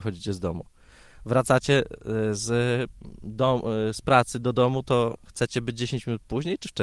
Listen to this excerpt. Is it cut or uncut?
uncut